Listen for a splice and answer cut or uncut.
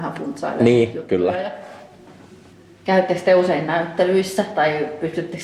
uncut